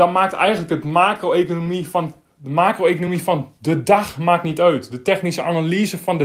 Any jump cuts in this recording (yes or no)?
no